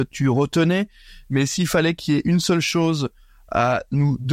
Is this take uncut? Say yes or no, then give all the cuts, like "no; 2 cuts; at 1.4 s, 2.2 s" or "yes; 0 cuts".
yes; 0 cuts